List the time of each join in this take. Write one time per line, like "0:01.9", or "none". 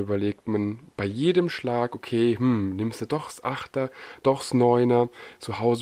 none